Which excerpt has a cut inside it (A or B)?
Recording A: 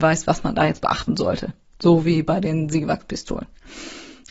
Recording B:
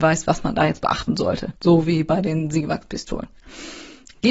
B